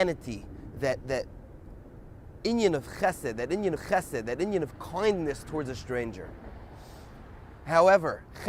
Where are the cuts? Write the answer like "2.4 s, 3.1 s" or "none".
3.8 s